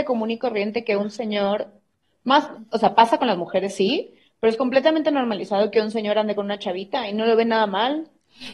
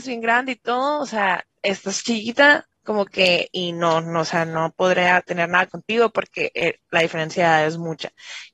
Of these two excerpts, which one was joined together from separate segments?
second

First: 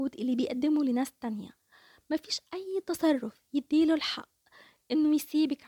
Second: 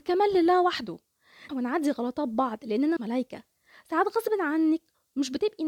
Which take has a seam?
second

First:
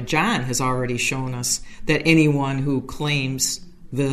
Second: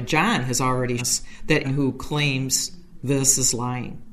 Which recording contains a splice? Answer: second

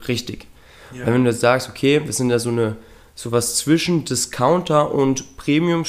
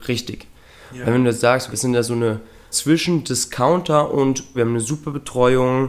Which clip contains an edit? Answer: second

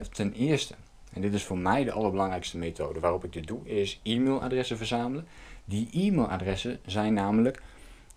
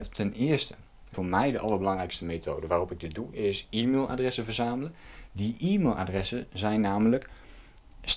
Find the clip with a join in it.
second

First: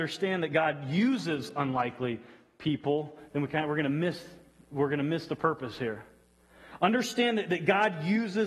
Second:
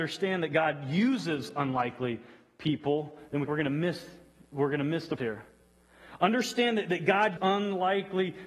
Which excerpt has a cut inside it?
second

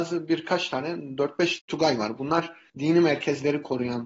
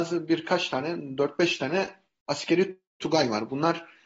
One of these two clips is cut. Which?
first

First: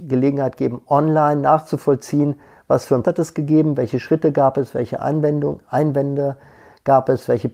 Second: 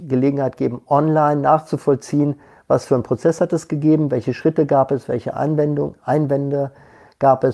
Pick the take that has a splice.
first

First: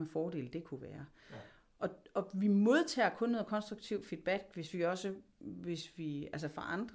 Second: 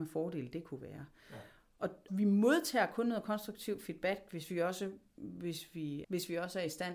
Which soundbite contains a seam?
second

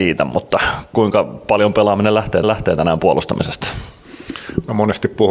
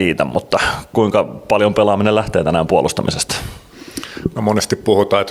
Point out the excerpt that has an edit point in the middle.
first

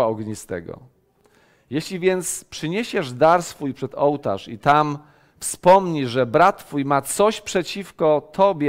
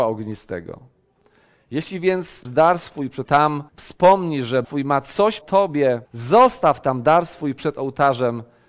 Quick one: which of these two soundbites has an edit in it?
second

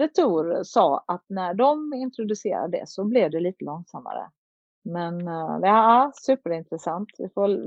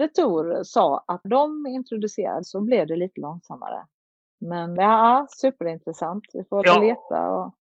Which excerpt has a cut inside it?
second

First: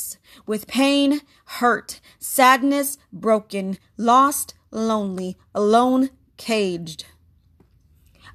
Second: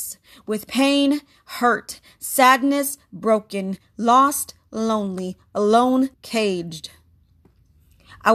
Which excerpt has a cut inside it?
second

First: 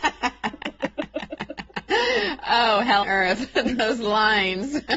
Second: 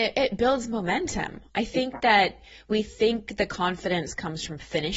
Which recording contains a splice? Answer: first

